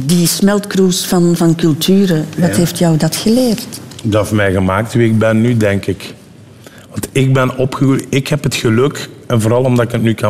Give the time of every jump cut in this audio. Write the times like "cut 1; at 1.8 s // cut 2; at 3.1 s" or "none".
cut 1; at 1.4 s